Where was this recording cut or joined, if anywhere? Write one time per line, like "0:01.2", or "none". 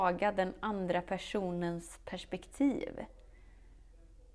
none